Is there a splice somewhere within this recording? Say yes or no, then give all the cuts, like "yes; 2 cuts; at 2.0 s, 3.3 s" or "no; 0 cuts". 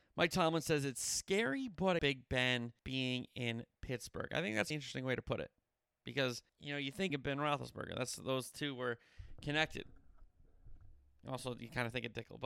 yes; 5 cuts; at 2.0 s, 2.8 s, 4.7 s, 6.5 s, 7.1 s